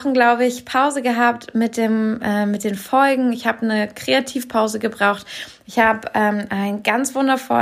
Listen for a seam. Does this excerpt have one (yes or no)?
no